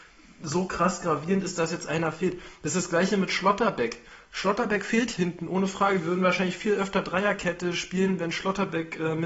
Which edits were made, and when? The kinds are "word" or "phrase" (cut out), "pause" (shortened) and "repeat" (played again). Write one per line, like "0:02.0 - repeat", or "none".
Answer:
none